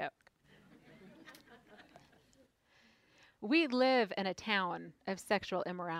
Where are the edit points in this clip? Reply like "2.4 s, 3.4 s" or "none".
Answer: none